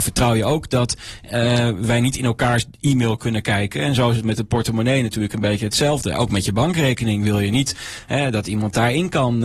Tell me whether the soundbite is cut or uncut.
uncut